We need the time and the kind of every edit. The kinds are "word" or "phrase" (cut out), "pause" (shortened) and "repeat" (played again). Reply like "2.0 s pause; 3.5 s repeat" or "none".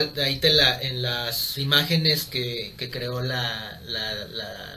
none